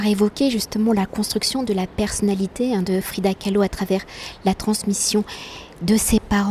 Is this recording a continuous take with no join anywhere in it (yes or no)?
yes